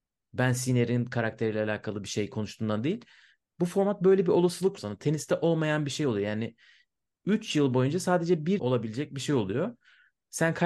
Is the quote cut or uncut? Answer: cut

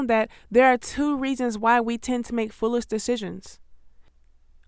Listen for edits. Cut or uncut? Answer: uncut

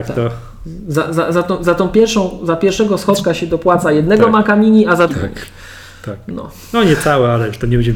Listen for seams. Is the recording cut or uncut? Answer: cut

